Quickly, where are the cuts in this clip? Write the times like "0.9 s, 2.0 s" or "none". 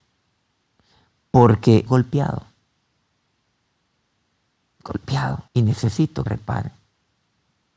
1.9 s, 5.5 s, 6.3 s